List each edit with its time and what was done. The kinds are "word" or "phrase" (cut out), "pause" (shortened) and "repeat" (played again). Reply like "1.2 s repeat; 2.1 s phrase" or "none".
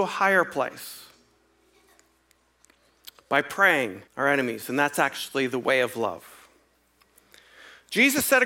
4.1 s pause